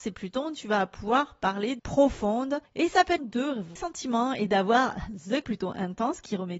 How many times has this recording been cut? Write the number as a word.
five